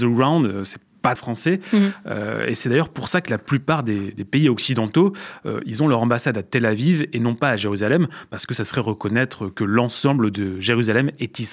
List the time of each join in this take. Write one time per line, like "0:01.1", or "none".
0:01.1

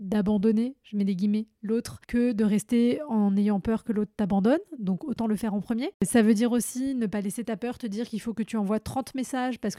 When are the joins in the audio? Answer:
0:02.0
0:05.9

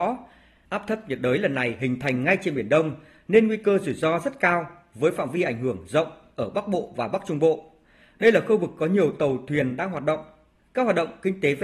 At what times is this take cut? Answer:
none

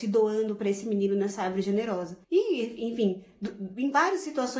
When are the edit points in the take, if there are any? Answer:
0:02.2

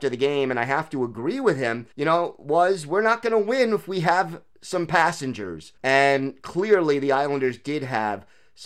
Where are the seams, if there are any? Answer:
0:01.9
0:04.5
0:05.8

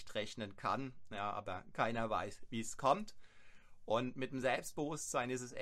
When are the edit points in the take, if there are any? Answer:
none

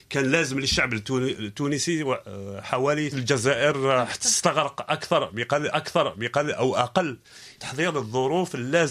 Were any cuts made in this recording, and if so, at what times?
0:03.1
0:05.7
0:07.6

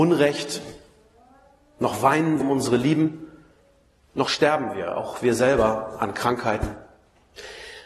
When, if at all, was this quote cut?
0:02.4

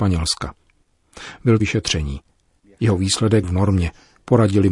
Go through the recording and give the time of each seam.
0:01.6
0:03.4

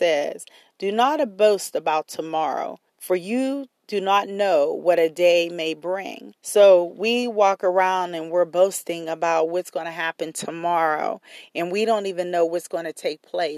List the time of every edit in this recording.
0:02.9
0:03.8
0:06.4

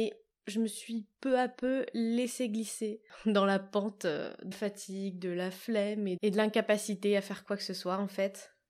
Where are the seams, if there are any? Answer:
0:04.5
0:06.2

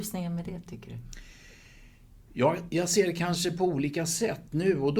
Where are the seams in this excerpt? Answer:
none

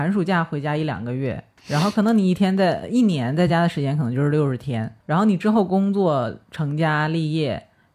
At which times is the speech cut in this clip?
0:01.6
0:05.0

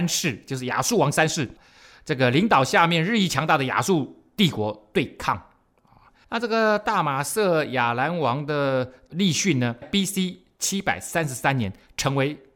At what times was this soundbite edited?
0:06.2
0:09.8

